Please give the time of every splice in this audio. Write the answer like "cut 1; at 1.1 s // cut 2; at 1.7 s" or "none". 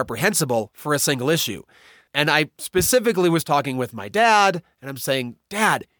none